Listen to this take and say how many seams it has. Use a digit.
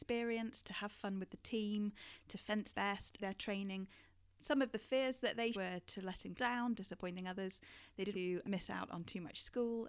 6